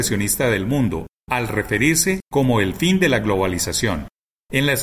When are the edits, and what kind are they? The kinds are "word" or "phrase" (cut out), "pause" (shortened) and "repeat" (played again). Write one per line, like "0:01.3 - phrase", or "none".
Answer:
none